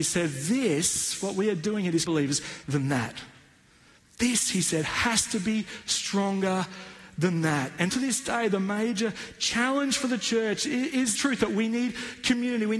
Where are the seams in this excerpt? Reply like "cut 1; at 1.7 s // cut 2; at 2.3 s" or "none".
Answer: cut 1; at 2.1 s // cut 2; at 2.6 s // cut 3; at 7.9 s // cut 4; at 11.1 s